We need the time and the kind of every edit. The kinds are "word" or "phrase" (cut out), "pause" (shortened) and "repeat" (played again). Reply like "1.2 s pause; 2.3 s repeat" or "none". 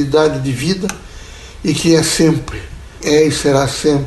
3.0 s word